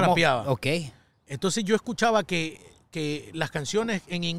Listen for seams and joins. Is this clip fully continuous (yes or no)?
yes